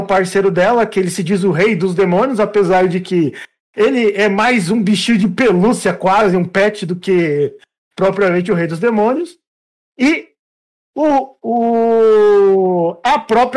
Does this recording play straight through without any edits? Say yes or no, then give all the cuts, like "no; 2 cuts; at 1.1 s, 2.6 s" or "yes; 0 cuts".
yes; 0 cuts